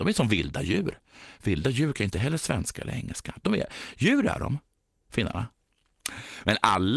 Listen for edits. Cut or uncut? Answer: uncut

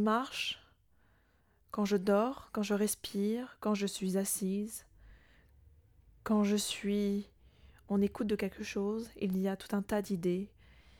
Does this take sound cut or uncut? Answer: uncut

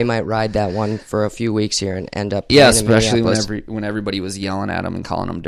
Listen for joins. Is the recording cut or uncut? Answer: uncut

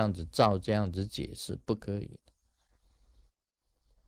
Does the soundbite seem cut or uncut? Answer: uncut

